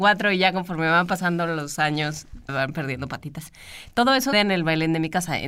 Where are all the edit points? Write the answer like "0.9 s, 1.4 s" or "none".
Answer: 2.5 s, 4.3 s